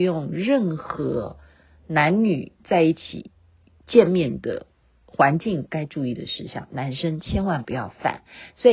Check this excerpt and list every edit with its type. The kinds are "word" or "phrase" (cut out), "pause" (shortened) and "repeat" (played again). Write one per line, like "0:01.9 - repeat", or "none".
none